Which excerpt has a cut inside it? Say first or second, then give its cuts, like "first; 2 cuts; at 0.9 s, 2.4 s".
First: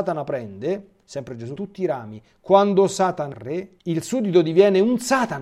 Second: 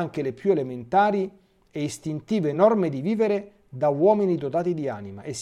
first; 3 cuts; at 1.6 s, 3.3 s, 3.8 s